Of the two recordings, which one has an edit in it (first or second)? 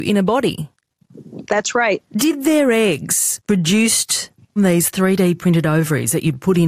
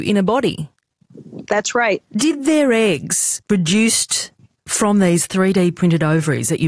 first